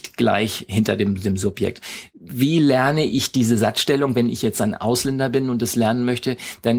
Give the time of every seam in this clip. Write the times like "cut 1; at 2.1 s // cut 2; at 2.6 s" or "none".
none